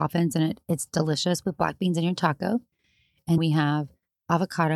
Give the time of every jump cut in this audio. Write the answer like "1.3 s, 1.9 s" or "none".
3.4 s